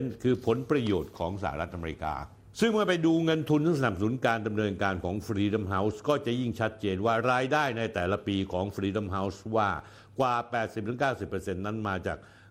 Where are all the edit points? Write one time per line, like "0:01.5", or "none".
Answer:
none